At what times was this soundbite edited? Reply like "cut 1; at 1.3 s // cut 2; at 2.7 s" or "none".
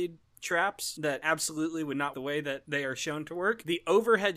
cut 1; at 2.1 s